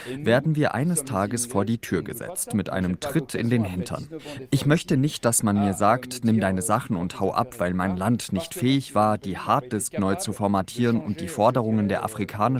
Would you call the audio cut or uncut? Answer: uncut